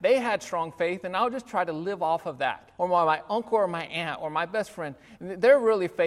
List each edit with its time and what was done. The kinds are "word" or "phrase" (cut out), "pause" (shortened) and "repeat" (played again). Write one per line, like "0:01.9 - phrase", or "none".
0:02.8 - pause